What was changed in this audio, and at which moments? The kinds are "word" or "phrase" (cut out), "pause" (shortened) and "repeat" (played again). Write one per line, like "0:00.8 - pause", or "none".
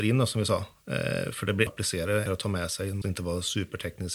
0:01.7 - word
0:02.3 - word
0:03.0 - word